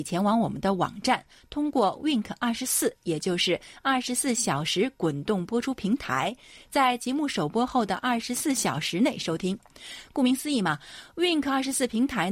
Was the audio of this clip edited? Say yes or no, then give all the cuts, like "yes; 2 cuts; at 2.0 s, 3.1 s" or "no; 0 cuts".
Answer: no; 0 cuts